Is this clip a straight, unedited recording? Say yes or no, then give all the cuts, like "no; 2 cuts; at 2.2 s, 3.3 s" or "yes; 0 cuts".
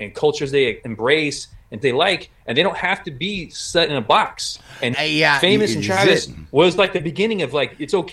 no; 2 cuts; at 1.8 s, 4.9 s